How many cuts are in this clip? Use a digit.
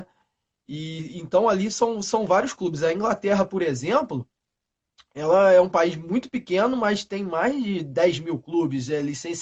0